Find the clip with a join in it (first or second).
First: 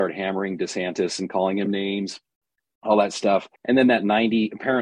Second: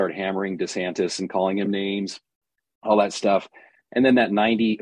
first